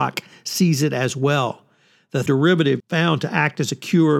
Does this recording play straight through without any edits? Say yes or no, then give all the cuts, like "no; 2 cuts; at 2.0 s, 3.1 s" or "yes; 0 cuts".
no; 2 cuts; at 2.3 s, 2.8 s